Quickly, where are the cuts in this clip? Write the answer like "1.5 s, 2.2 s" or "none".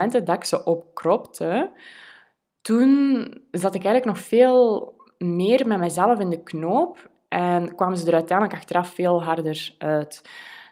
none